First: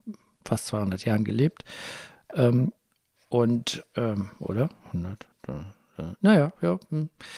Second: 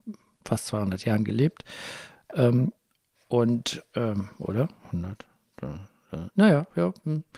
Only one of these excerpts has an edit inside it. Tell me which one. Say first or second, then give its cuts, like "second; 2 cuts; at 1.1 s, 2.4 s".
first; 1 cut; at 5.3 s